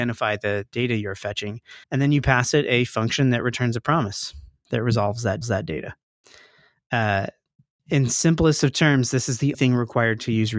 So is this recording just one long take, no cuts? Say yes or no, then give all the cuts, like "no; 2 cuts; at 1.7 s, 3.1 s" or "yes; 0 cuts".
no; 3 cuts; at 1.8 s, 5.4 s, 9.5 s